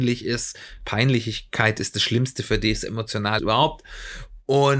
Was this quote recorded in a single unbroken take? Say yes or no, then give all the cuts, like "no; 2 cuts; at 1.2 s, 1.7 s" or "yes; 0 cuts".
no; 1 cut; at 3.4 s